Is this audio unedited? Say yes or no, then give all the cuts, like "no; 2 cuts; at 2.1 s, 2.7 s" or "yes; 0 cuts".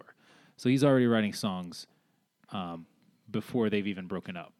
yes; 0 cuts